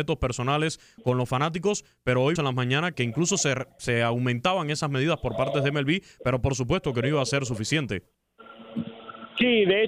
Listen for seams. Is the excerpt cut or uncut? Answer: cut